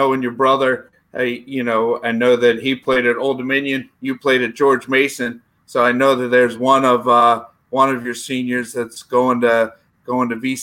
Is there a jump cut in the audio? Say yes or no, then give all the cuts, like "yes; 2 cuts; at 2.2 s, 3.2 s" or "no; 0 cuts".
no; 0 cuts